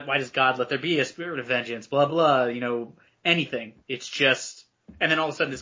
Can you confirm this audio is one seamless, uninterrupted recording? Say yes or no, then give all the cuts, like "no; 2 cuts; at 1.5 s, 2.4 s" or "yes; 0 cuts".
no; 2 cuts; at 2.1 s, 3.8 s